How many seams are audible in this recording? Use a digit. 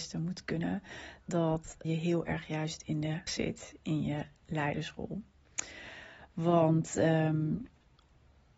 4